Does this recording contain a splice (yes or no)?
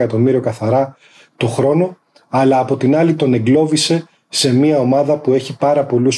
no